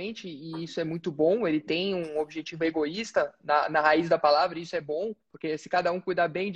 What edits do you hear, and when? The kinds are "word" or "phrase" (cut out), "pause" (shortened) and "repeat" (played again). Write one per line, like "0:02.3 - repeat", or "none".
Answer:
0:05.2 - pause